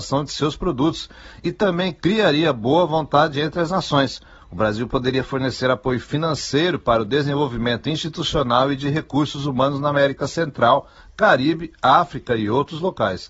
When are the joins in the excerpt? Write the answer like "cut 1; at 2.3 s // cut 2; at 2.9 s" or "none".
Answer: none